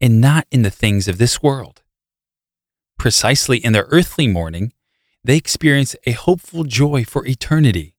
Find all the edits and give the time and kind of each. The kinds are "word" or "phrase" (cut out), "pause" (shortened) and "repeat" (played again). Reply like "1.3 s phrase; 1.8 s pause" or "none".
none